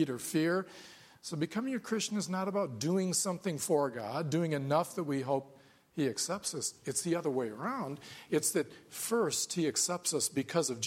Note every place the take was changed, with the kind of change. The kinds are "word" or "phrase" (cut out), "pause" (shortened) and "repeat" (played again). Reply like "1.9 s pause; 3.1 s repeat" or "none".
none